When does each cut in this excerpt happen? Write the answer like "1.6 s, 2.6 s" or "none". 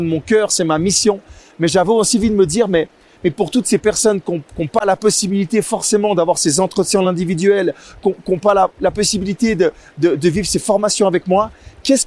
none